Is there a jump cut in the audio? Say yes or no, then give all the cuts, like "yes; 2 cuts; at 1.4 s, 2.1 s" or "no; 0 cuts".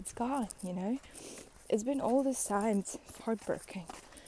yes; 1 cut; at 3.2 s